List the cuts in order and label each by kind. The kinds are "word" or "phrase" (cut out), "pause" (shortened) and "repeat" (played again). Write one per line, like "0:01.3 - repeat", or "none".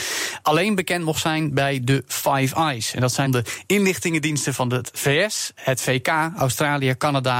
0:03.3 - word

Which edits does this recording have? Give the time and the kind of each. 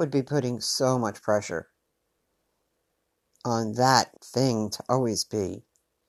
0:04.2 - pause

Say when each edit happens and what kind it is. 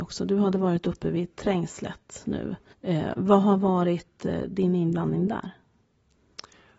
0:02.7 - pause

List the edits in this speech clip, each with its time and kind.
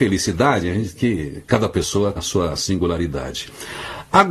0:01.0 - word
0:02.2 - word

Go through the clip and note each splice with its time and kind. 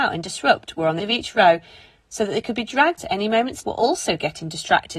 0:01.0 - word
0:03.0 - word
0:03.6 - word

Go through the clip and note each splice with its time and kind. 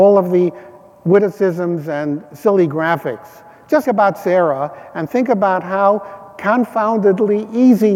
0:03.8 - word

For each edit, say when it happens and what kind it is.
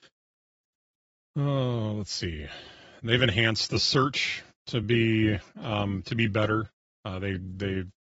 none

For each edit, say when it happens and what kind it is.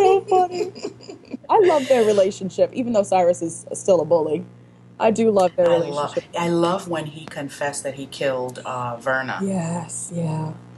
none

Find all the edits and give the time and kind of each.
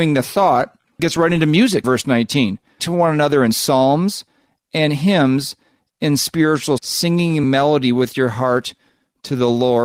0:01.8 - word
0:02.8 - word
0:06.8 - word
0:07.4 - word

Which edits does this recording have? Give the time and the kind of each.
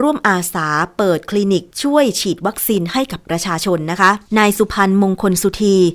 0:01.7 - pause
0:04.3 - pause

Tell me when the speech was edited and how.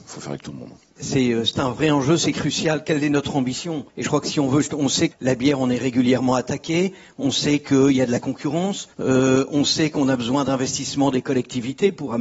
0:03.9 - pause
0:05.1 - word
0:08.9 - pause

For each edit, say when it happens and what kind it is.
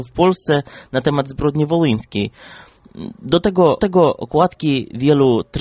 0:03.8 - repeat

